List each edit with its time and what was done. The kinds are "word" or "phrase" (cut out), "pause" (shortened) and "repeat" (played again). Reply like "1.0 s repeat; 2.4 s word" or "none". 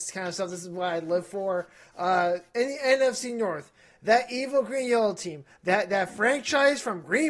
none

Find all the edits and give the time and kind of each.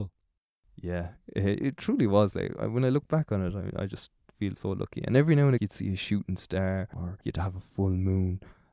1.6 s word; 5.6 s word

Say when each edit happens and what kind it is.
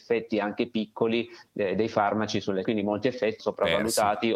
2.6 s word; 3.4 s word

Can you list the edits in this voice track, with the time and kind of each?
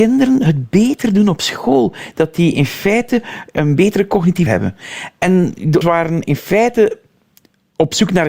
4.5 s word; 5.8 s word

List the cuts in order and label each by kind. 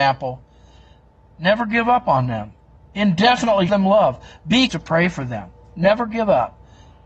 3.7 s word; 4.7 s word

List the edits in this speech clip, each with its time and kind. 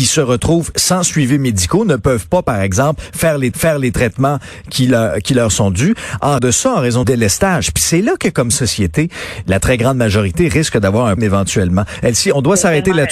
3.5 s repeat; 6.4 s word; 7.0 s word; 11.2 s word

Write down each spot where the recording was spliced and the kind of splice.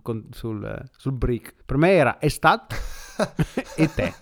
1.6 s pause

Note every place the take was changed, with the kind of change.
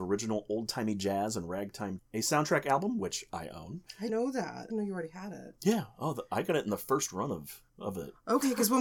2.0 s word; 4.1 s word; 4.7 s word; 7.7 s pause

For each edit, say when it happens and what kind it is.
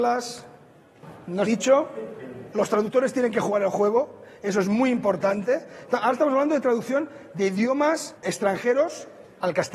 1.5 s phrase; 8.2 s pause

